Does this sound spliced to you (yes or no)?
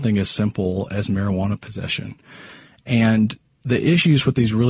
no